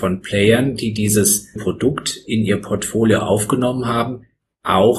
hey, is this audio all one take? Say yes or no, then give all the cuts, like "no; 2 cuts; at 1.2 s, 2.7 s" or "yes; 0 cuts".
no; 1 cut; at 1.6 s